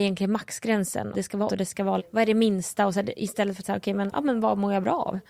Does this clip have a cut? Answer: yes; 5 cuts; at 1.1 s, 1.5 s, 2.0 s, 3.6 s, 4.1 s

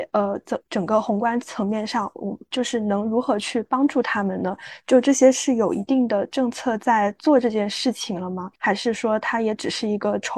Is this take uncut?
no; 1 cut; at 8.6 s

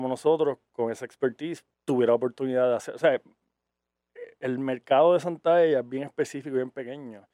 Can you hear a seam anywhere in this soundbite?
yes; 1 cut; at 1.7 s

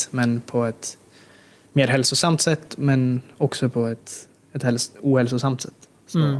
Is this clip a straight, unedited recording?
yes; 0 cuts

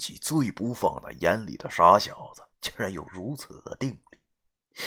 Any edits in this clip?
yes; 1 cut; at 2.5 s

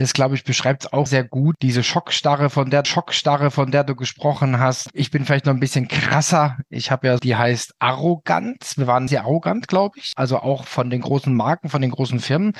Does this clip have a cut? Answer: yes; 4 cuts; at 1.1 s, 2.8 s, 7.2 s, 9.1 s

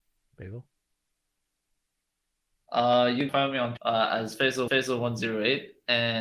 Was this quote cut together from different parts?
yes; 3 cuts; at 3.3 s, 3.8 s, 4.7 s

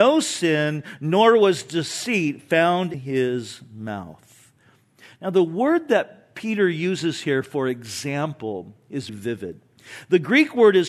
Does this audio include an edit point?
yes; 2 cuts; at 2.9 s, 9.1 s

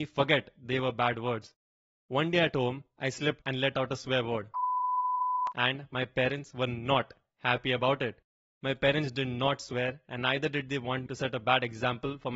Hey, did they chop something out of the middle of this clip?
yes; 2 cuts; at 3.4 s, 11.1 s

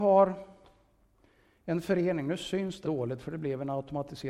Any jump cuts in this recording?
yes; 1 cut; at 2.8 s

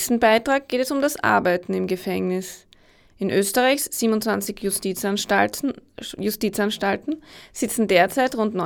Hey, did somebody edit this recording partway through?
no; 0 cuts

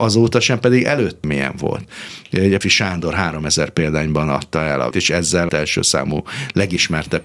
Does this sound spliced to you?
yes; 4 cuts; at 1.2 s, 2.6 s, 4.9 s, 5.5 s

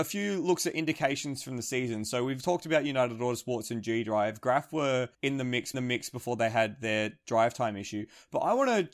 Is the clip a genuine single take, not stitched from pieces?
no; 2 cuts; at 5.1 s, 5.7 s

